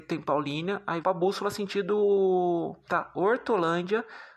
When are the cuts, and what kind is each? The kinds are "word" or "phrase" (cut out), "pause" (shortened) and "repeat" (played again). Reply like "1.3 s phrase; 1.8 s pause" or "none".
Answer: 1.0 s phrase; 2.9 s word